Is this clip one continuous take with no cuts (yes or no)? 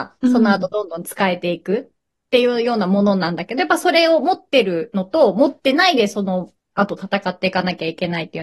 yes